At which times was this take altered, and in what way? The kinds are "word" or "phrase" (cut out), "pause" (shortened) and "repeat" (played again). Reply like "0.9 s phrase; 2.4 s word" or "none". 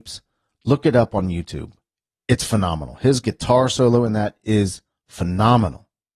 none